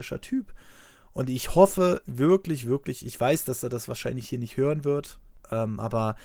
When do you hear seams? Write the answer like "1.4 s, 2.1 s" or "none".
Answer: 2.6 s